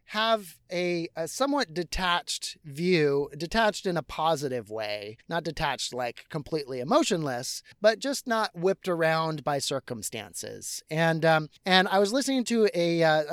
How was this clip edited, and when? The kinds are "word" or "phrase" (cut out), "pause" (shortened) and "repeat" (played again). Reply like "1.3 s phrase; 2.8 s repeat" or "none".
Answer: 5.2 s pause; 7.7 s pause; 11.6 s pause